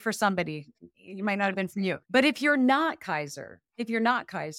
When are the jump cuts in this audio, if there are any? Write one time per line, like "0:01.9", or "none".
0:02.0